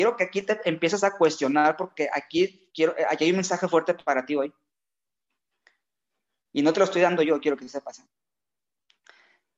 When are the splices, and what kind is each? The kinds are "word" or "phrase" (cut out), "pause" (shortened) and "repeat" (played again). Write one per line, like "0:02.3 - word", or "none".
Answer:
none